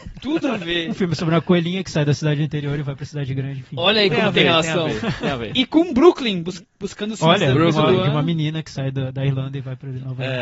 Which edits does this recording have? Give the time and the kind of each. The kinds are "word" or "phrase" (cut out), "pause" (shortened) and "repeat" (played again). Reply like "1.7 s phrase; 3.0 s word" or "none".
none